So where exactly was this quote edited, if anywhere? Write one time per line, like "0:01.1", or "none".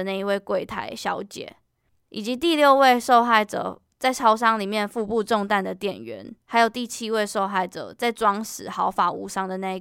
0:01.9
0:06.4